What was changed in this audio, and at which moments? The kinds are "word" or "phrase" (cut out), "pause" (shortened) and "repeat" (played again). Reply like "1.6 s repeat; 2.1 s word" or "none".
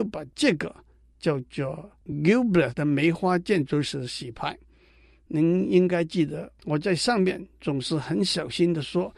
2.7 s word